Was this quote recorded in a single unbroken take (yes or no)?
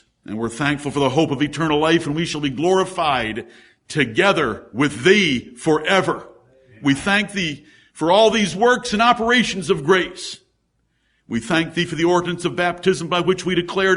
yes